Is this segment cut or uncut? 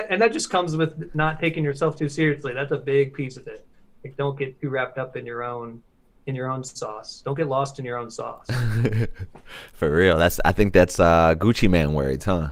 uncut